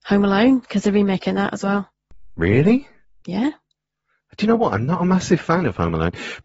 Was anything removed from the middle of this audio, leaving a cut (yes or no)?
yes